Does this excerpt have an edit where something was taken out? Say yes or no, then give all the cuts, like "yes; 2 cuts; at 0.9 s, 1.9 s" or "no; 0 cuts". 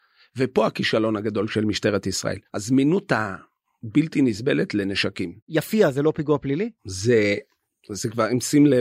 yes; 3 cuts; at 2.5 s, 5.4 s, 6.8 s